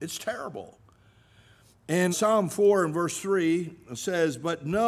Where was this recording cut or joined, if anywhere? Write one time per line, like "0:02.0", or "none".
0:02.1